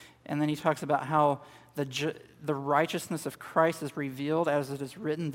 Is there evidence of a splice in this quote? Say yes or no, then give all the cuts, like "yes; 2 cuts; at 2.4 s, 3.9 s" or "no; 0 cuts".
no; 0 cuts